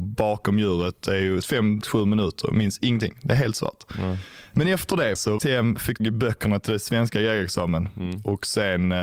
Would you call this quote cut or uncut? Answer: cut